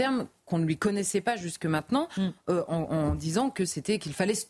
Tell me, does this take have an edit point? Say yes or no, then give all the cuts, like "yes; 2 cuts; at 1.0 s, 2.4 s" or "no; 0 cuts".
no; 0 cuts